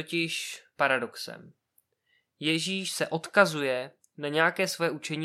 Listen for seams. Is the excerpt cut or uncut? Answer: uncut